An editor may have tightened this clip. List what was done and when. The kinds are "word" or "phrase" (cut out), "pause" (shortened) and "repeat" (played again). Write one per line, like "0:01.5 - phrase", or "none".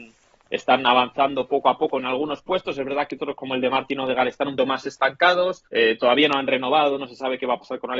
0:04.6 - word
0:05.7 - pause